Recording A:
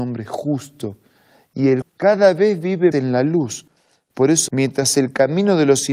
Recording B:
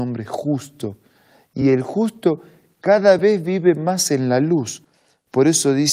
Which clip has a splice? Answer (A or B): A